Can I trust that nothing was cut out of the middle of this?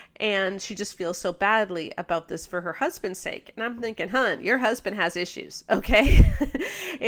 yes; 0 cuts

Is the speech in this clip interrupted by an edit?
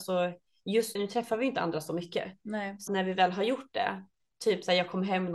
yes; 2 cuts; at 1.0 s, 2.9 s

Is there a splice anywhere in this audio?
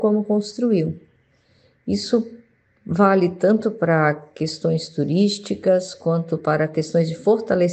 no; 0 cuts

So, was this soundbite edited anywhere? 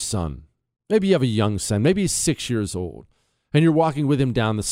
no; 0 cuts

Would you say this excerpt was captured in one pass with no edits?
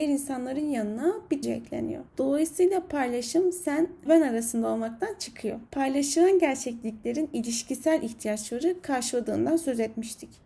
no; 4 cuts; at 1.4 s, 2.1 s, 4.1 s, 5.7 s

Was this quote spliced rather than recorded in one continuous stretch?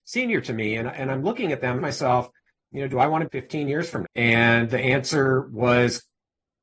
yes; 3 cuts; at 1.8 s, 3.2 s, 4.0 s

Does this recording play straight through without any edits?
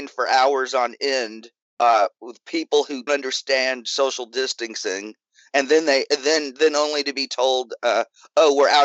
no; 1 cut; at 3.1 s

